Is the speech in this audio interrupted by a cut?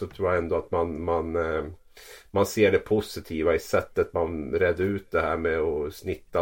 no; 0 cuts

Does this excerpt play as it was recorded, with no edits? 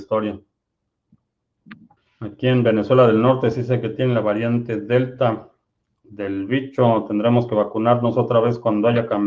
yes; 0 cuts

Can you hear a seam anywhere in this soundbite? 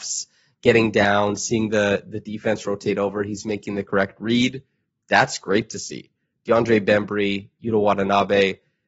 no; 0 cuts

